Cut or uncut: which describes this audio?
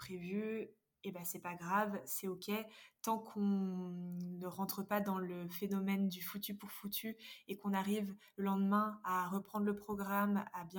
uncut